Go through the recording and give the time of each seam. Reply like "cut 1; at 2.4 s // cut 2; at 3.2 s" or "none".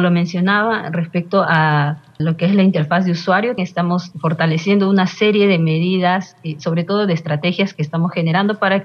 cut 1; at 2.2 s // cut 2; at 3.6 s // cut 3; at 4.1 s